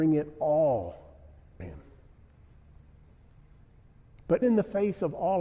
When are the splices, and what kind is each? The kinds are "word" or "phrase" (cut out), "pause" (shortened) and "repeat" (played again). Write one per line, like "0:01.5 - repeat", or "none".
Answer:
0:01.6 - word
0:04.4 - word